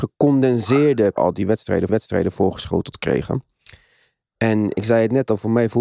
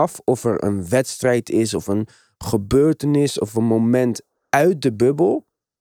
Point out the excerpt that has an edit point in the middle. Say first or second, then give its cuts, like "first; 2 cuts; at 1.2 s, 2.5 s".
first; 2 cuts; at 1.2 s, 1.9 s